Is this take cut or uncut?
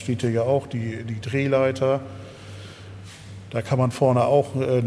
uncut